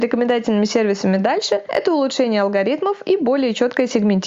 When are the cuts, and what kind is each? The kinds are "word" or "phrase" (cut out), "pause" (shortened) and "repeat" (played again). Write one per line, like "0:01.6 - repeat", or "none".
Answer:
none